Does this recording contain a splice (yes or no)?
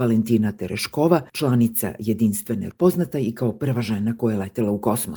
yes